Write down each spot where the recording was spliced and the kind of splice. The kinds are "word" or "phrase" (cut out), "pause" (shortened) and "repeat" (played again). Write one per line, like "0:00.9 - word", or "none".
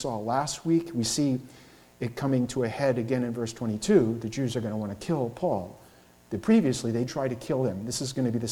0:07.1 - word